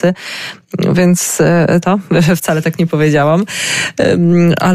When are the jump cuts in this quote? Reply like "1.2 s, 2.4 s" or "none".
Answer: 1.8 s